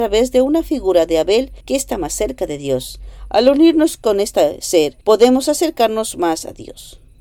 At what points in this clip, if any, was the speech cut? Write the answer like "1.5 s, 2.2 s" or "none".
1.6 s, 5.0 s